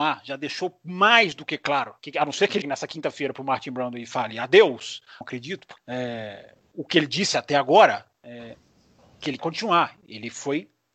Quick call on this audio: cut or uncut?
cut